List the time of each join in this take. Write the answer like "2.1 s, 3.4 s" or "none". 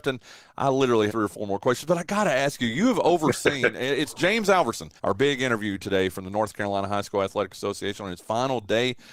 1.1 s, 5.0 s